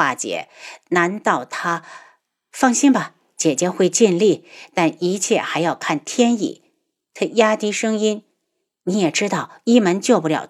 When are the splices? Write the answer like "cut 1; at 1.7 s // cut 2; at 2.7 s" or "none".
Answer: none